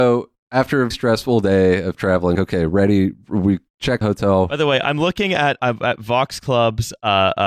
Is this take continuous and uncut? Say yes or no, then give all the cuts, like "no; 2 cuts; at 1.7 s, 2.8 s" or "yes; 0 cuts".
no; 4 cuts; at 0.9 s, 2.4 s, 4.0 s, 5.6 s